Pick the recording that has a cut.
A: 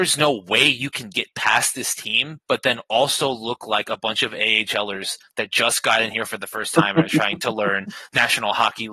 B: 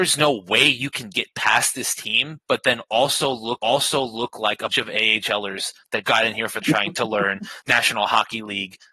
B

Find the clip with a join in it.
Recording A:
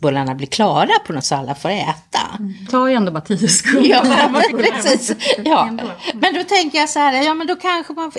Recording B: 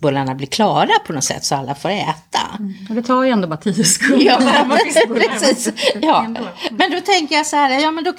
A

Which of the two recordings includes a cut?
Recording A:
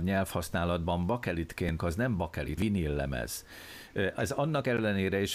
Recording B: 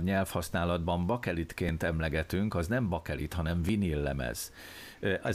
A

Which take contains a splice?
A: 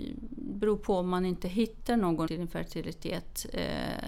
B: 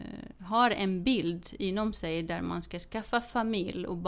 A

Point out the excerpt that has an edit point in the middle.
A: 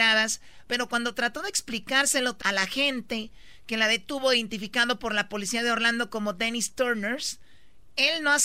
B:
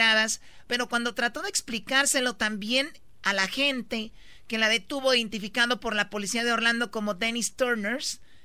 A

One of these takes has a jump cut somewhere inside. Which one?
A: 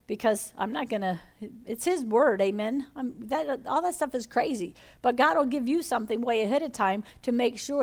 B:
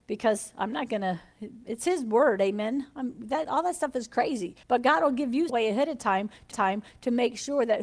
B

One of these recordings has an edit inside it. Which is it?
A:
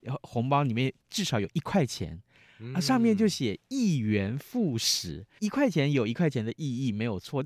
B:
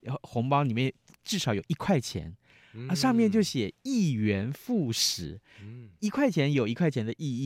A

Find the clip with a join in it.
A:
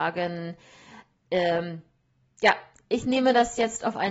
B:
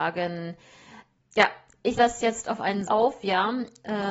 B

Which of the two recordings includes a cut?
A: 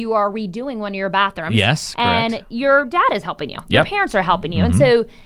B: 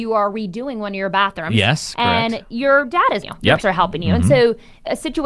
B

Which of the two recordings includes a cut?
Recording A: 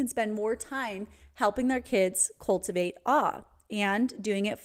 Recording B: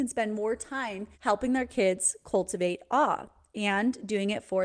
B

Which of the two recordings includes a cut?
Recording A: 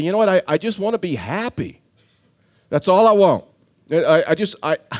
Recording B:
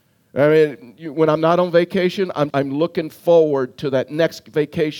B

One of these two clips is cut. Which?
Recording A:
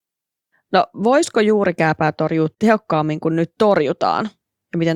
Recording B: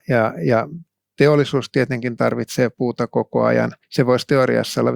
B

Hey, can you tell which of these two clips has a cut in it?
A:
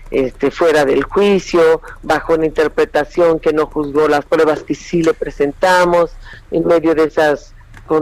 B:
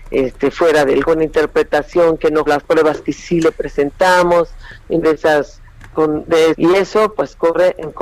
B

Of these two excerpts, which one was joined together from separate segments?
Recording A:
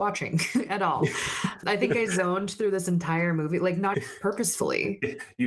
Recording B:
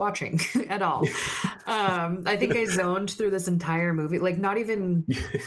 A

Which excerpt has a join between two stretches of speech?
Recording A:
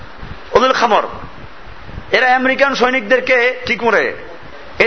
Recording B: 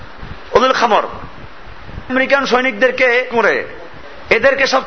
B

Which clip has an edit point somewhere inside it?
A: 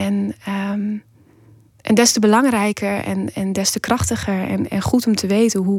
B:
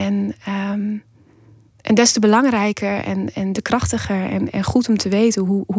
B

